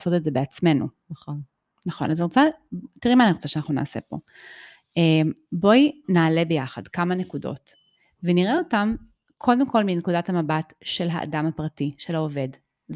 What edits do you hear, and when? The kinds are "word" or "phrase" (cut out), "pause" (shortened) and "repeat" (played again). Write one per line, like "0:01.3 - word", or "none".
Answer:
none

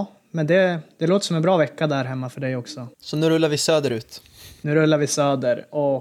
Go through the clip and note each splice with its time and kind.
0:02.9 - pause
0:04.6 - pause

